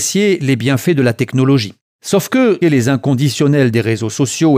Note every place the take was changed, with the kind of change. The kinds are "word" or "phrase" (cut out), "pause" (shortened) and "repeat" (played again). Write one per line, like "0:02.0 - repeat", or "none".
0:02.6 - phrase